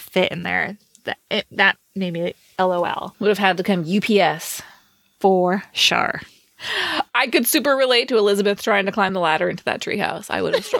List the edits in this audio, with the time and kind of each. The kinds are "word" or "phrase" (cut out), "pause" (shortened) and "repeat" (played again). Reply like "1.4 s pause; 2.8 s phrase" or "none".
none